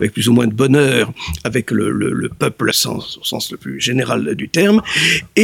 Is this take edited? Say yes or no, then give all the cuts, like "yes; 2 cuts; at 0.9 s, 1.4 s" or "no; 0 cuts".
yes; 1 cut; at 2.7 s